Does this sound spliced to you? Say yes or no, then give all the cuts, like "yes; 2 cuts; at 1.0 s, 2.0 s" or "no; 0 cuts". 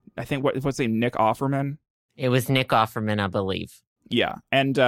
no; 0 cuts